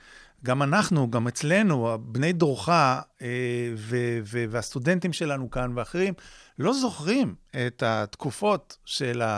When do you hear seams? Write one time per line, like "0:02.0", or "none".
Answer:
none